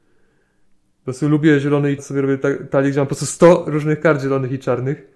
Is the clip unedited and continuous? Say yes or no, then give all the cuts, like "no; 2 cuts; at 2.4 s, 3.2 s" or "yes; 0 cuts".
no; 1 cut; at 2.0 s